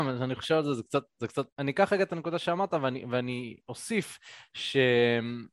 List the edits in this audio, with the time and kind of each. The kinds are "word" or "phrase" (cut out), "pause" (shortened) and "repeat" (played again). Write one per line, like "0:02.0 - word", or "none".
0:01.5 - phrase